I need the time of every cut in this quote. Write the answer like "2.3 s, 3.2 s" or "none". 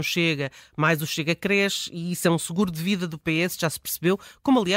none